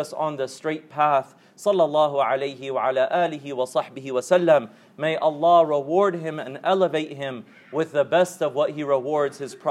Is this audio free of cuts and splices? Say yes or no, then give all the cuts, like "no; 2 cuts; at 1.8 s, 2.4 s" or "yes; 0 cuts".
yes; 0 cuts